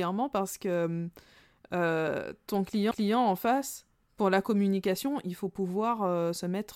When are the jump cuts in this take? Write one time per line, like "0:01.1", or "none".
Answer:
0:02.9